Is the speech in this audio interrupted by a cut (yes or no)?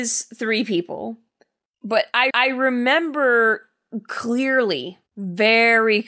yes